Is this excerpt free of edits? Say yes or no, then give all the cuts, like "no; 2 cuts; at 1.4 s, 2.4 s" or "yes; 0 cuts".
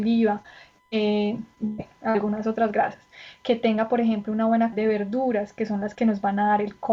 no; 1 cut; at 4.7 s